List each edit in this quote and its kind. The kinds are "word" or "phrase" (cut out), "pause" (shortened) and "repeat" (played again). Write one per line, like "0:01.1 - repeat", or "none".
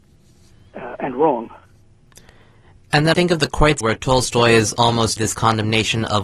0:03.1 - word
0:03.8 - word
0:05.2 - word